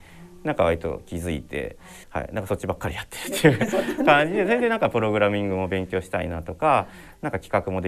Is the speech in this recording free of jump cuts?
no; 1 cut; at 2.0 s

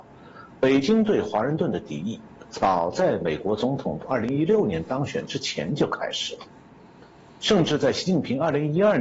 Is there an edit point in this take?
yes; 1 cut; at 4.0 s

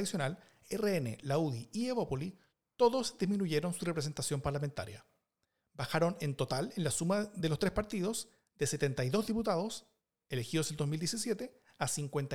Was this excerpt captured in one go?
yes; 0 cuts

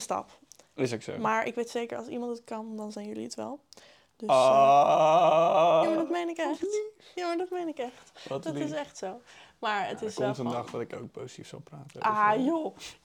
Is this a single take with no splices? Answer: yes; 0 cuts

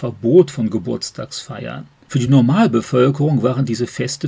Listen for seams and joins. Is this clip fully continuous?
yes; 0 cuts

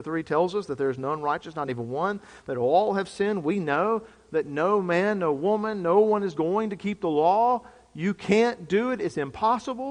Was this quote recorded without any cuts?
yes; 0 cuts

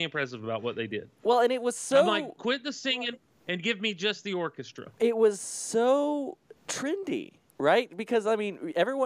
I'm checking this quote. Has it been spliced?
no; 0 cuts

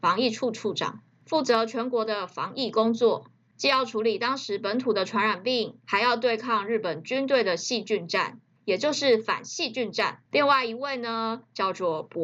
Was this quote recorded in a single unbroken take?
no; 1 cut; at 10.3 s

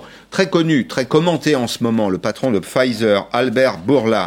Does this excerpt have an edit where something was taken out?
no; 0 cuts

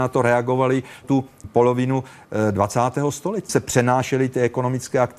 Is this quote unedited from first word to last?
no; 3 cuts; at 1.0 s, 1.4 s, 3.5 s

